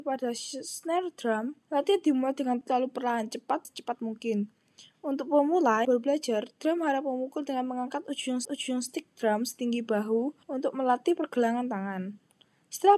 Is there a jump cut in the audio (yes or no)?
yes